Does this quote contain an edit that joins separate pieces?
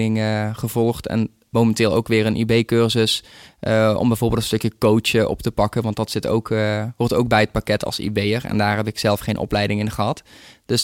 no; 0 cuts

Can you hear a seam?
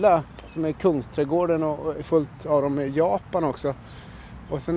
no; 0 cuts

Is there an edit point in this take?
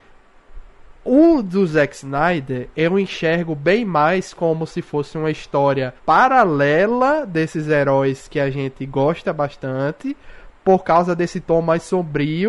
yes; 1 cut; at 6.0 s

